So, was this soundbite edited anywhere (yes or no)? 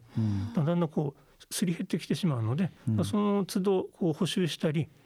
yes